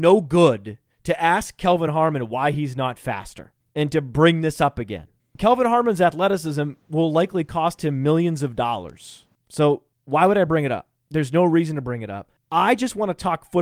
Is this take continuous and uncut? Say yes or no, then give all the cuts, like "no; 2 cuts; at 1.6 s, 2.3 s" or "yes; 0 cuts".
yes; 0 cuts